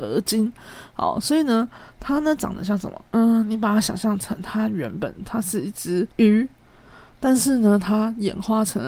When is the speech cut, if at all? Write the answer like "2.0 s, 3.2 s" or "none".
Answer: 3.1 s, 6.1 s